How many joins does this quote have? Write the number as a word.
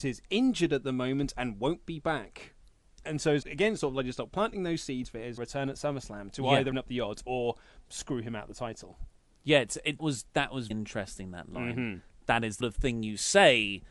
six